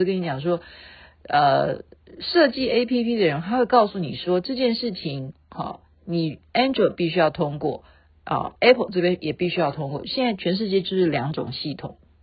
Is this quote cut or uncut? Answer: uncut